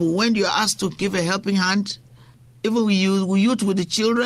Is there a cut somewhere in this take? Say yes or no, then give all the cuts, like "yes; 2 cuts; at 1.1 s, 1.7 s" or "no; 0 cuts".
no; 0 cuts